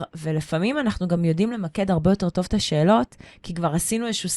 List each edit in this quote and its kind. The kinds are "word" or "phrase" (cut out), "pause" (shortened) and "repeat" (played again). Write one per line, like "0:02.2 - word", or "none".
none

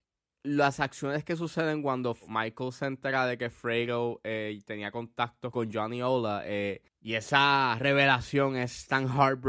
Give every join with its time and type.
0:06.9 - pause

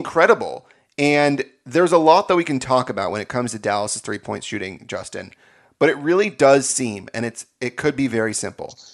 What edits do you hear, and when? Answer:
none

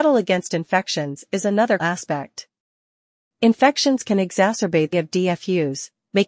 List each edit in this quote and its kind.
0:01.8 - word
0:04.9 - word

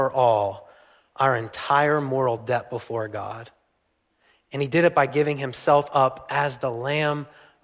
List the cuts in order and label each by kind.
none

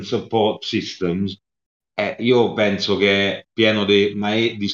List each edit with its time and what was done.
none

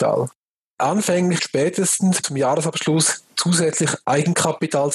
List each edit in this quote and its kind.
0:01.4 - phrase
0:02.2 - word

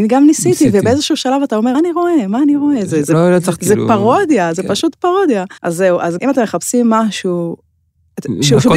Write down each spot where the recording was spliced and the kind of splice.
0:01.7 - word
0:03.6 - word
0:05.6 - pause
0:06.2 - word

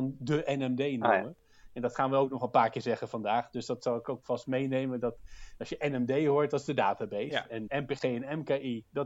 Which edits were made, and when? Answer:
0:07.7 - word

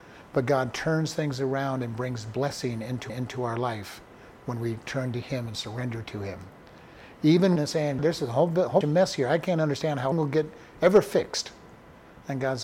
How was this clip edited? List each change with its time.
0:03.1 - repeat
0:07.6 - phrase
0:08.0 - word
0:08.8 - word
0:10.1 - word

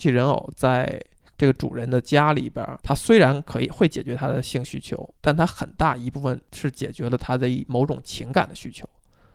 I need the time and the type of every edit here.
0:02.8 - pause
0:05.1 - pause

